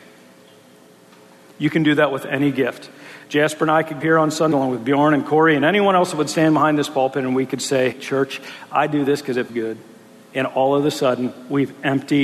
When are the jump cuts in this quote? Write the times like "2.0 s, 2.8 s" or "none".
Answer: 4.0 s, 4.5 s, 7.9 s, 9.5 s